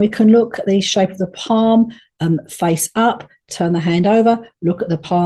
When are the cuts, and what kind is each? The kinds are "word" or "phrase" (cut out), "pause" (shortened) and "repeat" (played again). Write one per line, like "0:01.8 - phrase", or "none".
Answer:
none